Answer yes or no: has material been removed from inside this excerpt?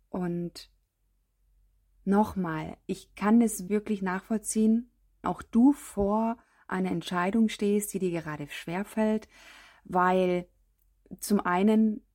yes